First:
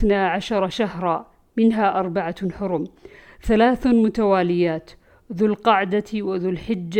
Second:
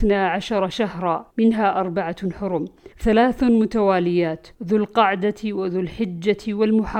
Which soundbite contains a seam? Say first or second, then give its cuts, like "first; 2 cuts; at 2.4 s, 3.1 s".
second; 3 cuts; at 1.3 s, 2.9 s, 4.5 s